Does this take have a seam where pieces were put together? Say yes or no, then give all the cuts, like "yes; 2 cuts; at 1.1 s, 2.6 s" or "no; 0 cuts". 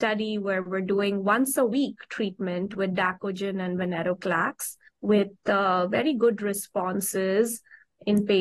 yes; 1 cut; at 4.9 s